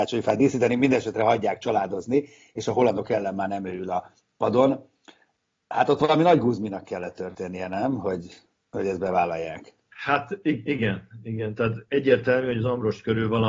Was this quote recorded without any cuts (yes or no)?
yes